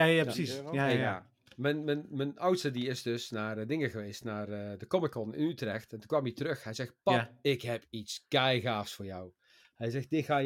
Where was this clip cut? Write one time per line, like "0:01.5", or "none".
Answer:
none